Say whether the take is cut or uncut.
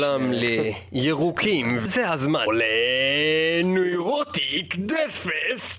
cut